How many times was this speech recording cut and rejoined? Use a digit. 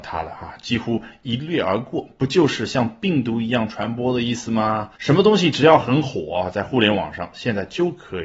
1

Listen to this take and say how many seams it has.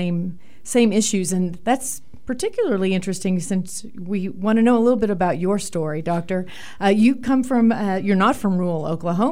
0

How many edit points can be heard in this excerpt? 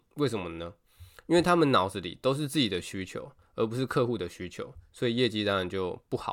0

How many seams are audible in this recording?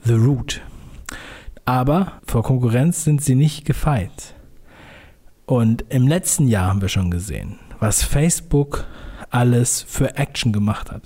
1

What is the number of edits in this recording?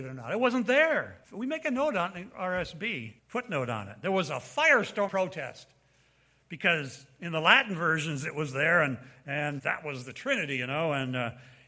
4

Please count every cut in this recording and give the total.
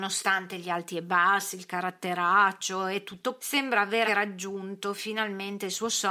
2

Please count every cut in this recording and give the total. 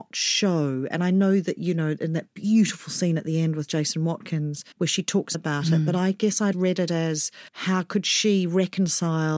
4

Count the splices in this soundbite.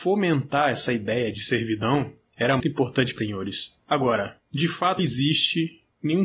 4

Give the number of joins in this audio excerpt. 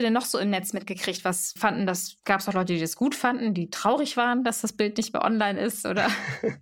1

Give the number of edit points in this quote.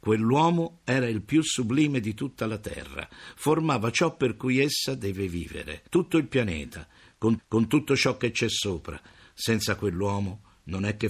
2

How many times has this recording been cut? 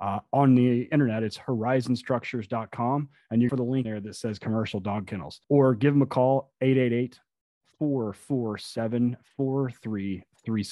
3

